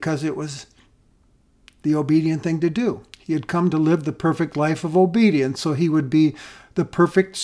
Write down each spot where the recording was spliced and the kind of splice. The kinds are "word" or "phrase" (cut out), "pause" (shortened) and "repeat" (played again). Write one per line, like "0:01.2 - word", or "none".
none